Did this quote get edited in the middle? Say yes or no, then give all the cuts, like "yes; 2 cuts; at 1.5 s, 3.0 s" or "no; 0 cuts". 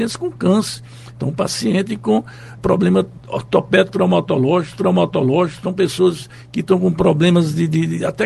yes; 3 cuts; at 2.6 s, 3.2 s, 4.8 s